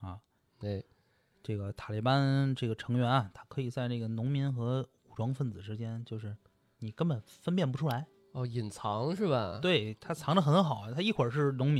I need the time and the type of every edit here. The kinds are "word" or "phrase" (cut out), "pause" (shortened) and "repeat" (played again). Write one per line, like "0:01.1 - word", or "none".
0:05.0 - pause